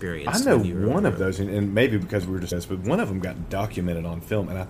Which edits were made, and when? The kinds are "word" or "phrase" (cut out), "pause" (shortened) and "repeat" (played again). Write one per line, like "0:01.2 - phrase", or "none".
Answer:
0:02.5 - phrase